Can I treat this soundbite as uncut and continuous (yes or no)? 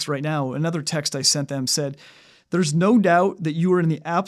yes